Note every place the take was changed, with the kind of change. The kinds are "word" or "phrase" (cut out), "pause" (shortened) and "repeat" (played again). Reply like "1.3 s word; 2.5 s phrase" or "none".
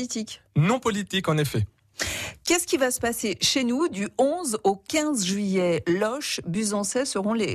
none